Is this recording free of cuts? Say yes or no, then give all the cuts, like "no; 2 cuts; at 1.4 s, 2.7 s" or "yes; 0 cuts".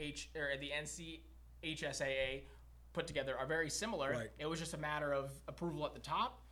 yes; 0 cuts